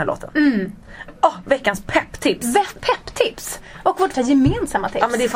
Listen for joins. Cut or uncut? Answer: cut